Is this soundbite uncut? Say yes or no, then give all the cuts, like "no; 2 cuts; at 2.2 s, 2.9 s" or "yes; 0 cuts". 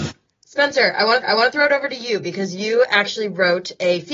no; 1 cut; at 1.2 s